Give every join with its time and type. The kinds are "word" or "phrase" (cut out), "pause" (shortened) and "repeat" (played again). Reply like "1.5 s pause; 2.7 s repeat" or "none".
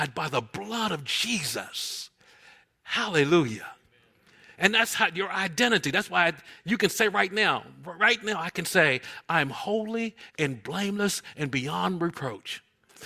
none

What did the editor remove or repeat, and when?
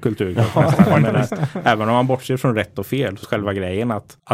3.2 s word

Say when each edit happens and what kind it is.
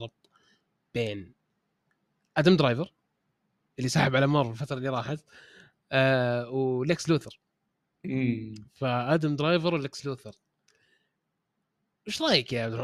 none

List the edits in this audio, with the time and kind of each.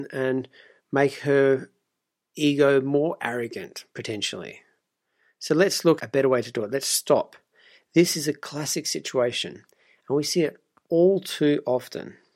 6.0 s word

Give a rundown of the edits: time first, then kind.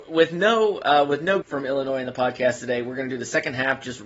1.4 s word

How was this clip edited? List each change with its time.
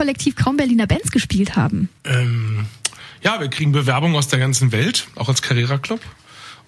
2.0 s pause

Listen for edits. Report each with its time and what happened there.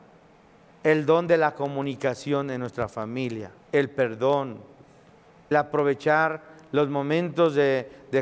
3.6 s pause; 5.5 s word

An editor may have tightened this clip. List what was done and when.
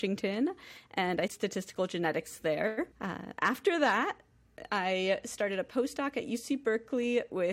1.3 s word; 2.9 s pause

